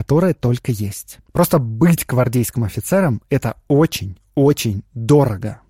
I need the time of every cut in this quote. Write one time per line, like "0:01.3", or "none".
0:01.3